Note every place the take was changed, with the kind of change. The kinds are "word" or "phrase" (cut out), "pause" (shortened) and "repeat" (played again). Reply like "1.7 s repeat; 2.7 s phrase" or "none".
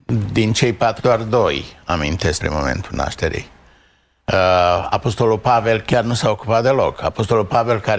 1.0 s word; 2.4 s word